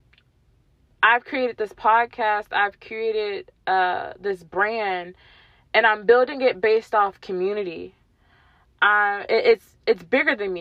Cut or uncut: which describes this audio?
uncut